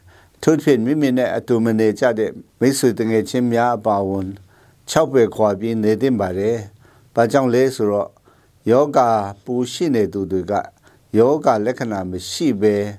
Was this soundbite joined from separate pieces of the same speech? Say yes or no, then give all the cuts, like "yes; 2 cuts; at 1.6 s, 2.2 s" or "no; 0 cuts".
yes; 1 cut; at 2.5 s